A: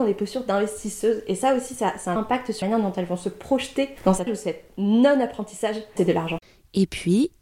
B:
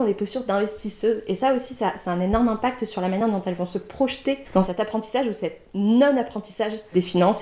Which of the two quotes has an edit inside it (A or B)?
A